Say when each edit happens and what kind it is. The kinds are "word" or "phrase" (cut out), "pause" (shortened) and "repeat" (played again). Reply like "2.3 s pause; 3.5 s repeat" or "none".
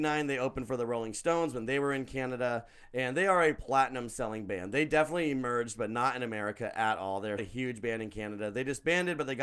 7.4 s word